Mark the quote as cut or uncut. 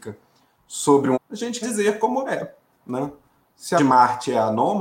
cut